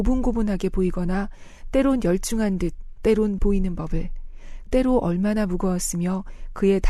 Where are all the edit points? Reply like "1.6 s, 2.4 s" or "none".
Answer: 3.4 s, 4.7 s